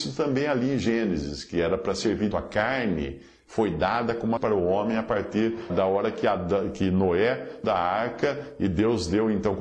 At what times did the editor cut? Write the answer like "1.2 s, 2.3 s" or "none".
2.3 s, 4.4 s, 5.7 s, 7.6 s